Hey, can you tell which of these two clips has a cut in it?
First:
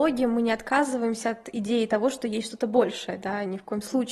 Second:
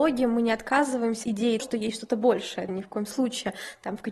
second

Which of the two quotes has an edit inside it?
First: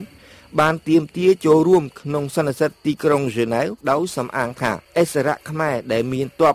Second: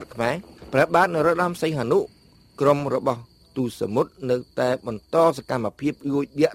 first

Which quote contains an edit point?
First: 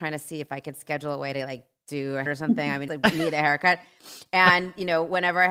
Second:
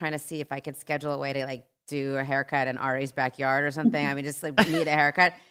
first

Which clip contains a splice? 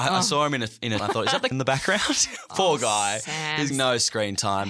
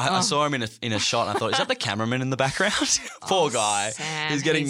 first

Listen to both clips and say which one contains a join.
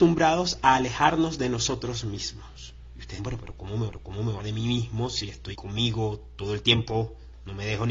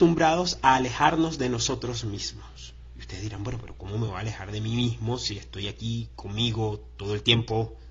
first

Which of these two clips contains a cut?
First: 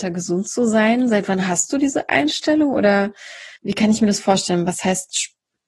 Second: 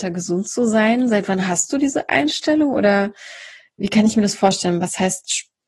first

